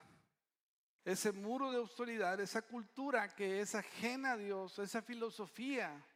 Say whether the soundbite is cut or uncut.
uncut